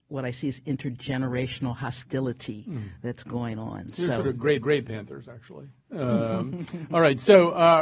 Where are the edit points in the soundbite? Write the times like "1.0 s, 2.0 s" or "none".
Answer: 4.6 s